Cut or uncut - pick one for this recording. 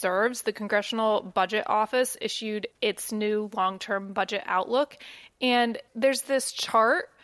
cut